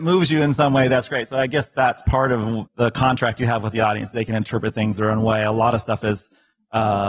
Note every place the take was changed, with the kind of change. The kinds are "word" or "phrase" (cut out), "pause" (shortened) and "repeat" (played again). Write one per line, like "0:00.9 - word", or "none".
0:02.7 - word